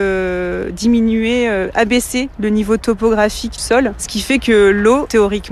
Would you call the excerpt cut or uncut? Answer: cut